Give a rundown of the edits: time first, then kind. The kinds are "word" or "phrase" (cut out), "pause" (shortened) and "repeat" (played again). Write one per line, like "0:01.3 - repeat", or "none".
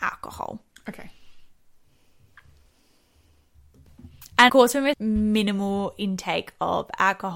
0:04.5 - word
0:04.9 - word